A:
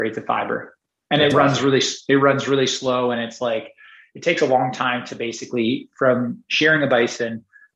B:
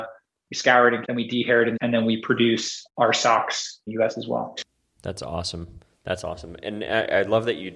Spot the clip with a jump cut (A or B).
B